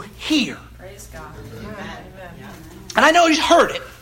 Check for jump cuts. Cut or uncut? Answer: uncut